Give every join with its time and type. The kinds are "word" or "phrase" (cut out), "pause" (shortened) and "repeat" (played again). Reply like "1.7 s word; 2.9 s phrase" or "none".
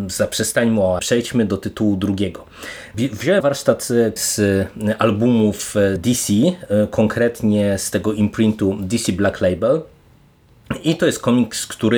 1.0 s word; 3.4 s word; 4.2 s word; 6.0 s phrase